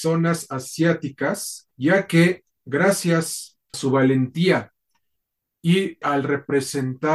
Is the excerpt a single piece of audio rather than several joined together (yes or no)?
no